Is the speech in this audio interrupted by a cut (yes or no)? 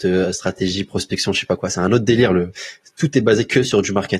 no